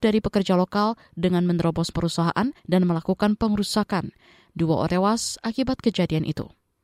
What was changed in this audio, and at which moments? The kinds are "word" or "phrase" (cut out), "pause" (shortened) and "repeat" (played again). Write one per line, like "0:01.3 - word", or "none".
0:01.9 - word
0:02.6 - pause
0:04.9 - word